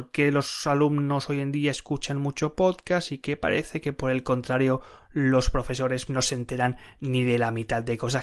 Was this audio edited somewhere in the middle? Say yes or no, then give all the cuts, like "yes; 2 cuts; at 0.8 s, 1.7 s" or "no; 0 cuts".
yes; 1 cut; at 6.1 s